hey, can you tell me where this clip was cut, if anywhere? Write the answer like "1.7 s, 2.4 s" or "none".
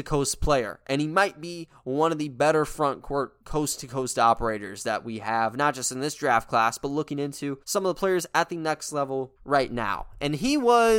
3.4 s, 7.6 s, 9.4 s